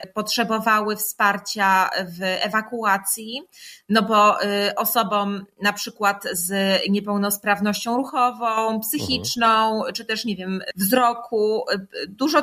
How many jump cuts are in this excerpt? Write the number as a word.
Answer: zero